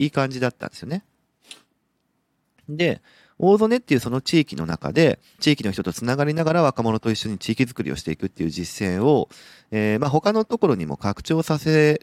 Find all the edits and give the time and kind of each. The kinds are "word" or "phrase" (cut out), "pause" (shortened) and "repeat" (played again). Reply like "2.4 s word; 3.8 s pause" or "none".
5.4 s phrase